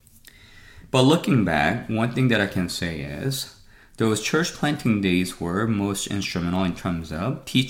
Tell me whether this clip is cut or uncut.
uncut